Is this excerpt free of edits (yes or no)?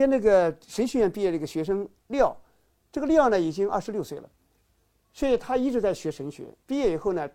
yes